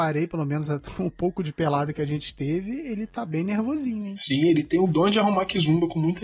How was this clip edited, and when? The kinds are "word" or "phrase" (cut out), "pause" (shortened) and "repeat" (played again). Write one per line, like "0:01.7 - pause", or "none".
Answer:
none